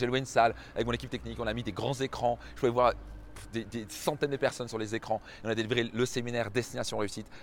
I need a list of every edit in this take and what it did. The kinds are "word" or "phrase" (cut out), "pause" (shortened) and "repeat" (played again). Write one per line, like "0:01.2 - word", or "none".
none